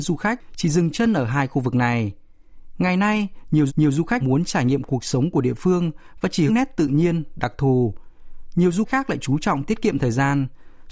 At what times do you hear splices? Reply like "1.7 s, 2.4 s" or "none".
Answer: 3.7 s, 4.2 s, 6.5 s, 8.8 s